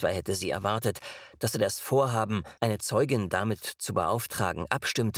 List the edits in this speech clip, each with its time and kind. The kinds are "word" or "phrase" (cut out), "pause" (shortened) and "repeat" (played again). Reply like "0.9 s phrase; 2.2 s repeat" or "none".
2.6 s pause